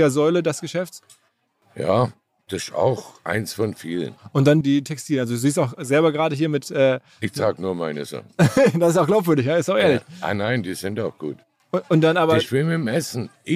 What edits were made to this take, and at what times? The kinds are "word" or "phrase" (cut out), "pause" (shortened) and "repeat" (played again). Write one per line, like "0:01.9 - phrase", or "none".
0:04.6 - word

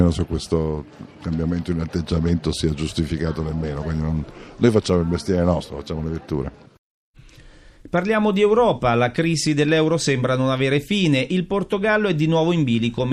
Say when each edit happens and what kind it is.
none

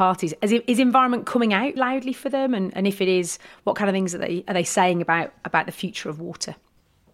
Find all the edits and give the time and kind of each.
0:01.8 - word

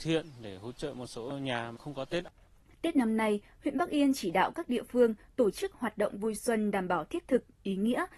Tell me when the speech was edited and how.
none

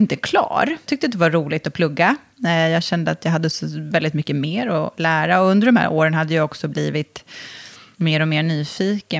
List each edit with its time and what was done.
none

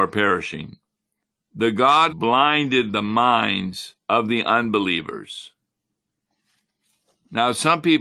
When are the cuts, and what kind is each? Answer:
0:01.2 - pause
0:02.1 - phrase
0:04.0 - pause

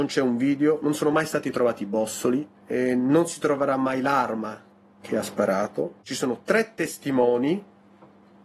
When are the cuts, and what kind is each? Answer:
0:02.6 - pause

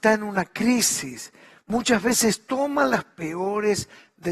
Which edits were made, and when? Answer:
none

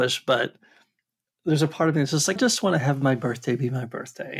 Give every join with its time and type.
0:02.4 - word

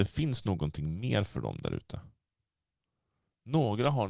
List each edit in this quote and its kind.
none

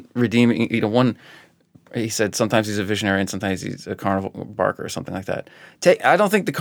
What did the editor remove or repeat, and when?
none

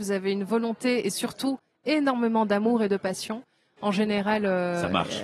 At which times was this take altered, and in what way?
none

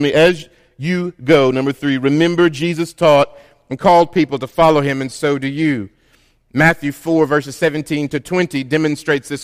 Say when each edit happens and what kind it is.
none

